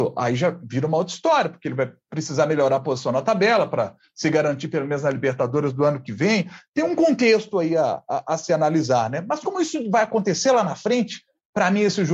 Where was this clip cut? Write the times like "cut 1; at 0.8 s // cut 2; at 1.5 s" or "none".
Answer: none